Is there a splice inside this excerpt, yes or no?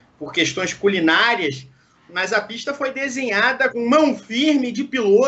yes